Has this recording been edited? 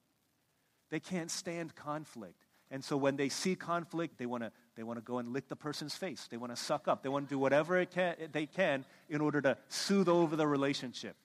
yes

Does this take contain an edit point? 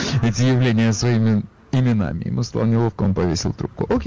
no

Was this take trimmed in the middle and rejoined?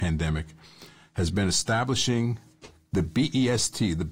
no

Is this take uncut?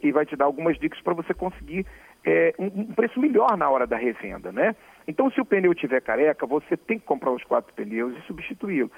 yes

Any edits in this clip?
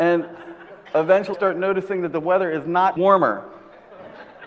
yes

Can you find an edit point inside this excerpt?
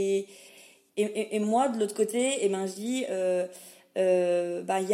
no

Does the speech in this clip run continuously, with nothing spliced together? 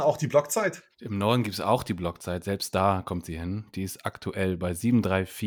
no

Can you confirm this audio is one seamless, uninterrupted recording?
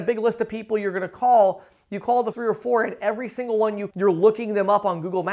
no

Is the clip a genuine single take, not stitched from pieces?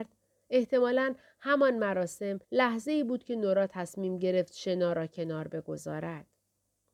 no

